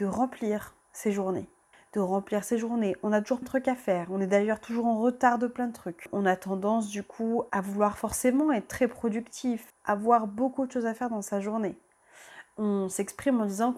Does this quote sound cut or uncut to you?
cut